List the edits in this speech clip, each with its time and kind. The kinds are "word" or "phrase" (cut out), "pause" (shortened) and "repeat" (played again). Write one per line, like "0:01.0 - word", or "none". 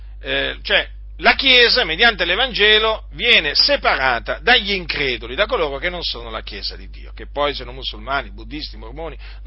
none